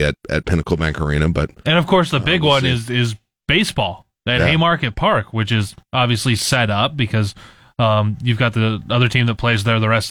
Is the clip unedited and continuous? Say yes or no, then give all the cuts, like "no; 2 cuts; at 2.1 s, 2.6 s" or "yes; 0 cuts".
yes; 0 cuts